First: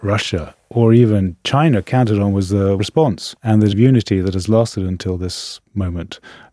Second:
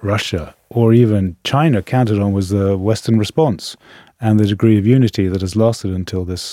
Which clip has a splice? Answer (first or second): first